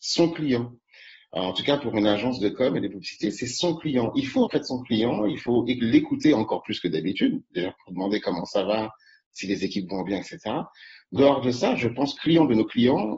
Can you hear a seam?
yes; 3 cuts; at 4.5 s, 11.2 s, 12.2 s

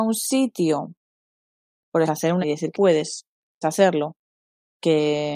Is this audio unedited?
no; 4 cuts; at 2.1 s, 2.4 s, 2.7 s, 3.6 s

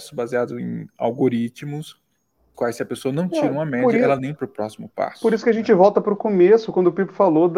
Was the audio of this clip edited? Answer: yes; 2 cuts; at 2.5 s, 4.4 s

